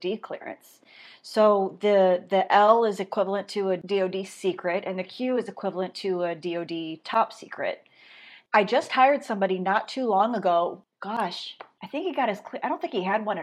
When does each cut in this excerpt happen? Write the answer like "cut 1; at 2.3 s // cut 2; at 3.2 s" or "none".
none